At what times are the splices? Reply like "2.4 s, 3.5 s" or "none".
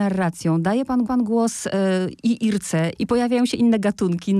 1.1 s, 3.0 s